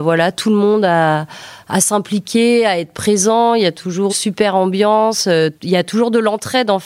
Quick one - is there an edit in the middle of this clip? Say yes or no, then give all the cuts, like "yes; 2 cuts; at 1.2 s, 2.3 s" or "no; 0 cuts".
yes; 1 cut; at 4.1 s